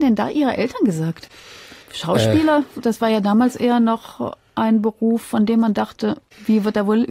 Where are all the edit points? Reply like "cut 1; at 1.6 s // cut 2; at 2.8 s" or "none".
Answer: cut 1; at 1.8 s